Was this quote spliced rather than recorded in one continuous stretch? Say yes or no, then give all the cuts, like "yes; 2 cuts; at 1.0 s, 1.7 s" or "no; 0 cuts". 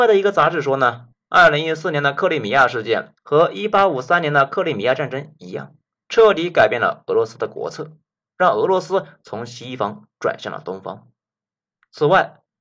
no; 0 cuts